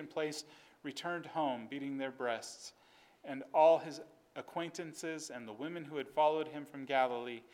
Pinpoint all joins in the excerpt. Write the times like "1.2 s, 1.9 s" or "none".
none

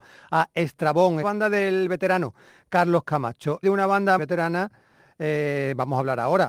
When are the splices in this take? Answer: 1.2 s, 3.6 s, 4.2 s

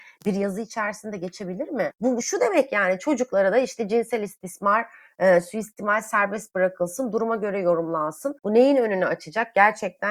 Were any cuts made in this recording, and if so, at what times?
8.4 s

